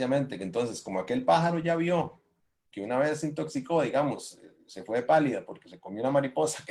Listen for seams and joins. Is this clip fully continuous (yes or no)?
yes